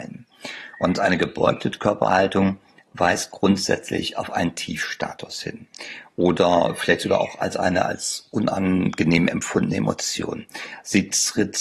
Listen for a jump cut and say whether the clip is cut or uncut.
uncut